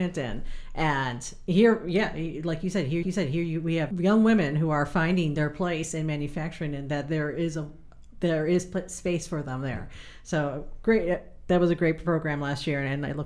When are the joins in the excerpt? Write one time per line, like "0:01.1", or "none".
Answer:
0:03.0
0:03.9